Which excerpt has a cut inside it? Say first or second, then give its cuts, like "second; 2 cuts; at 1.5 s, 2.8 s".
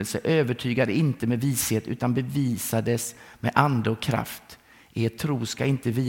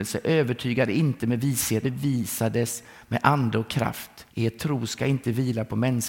second; 2 cuts; at 1.8 s, 4.3 s